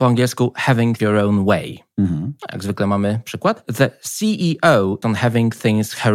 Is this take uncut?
no; 2 cuts; at 1.0 s, 5.0 s

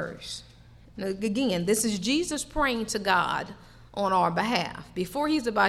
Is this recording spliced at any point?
no; 0 cuts

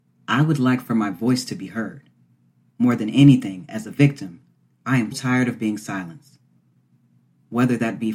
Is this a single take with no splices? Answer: no; 1 cut; at 5.1 s

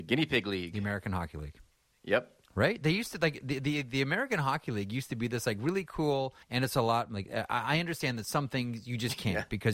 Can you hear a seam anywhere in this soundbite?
yes; 2 cuts; at 2.4 s, 6.4 s

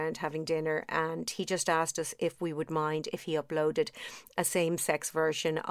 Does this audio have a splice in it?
no; 0 cuts

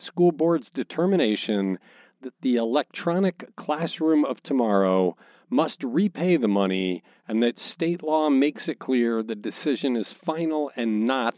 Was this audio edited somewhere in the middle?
no; 0 cuts

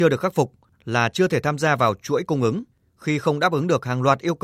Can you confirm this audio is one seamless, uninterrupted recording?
yes; 0 cuts

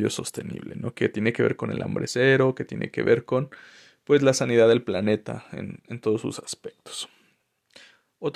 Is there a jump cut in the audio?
no; 0 cuts

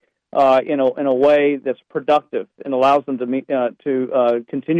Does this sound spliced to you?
no; 0 cuts

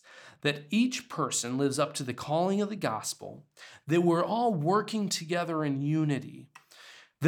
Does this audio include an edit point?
no; 0 cuts

